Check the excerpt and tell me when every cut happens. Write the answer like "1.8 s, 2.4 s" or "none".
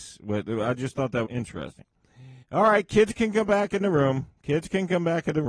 1.2 s, 2.4 s